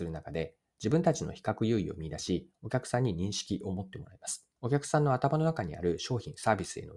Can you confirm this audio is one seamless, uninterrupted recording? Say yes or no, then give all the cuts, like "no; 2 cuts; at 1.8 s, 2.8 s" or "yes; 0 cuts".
no; 1 cut; at 4.6 s